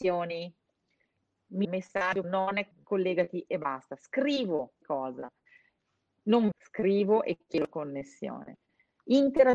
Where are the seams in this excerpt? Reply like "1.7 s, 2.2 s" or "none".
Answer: 1.6 s, 2.2 s, 2.7 s, 4.8 s, 6.5 s